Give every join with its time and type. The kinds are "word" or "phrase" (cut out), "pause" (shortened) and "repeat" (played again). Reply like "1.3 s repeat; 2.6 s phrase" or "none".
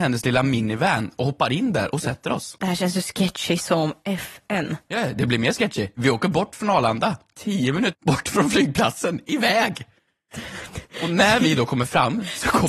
7.9 s word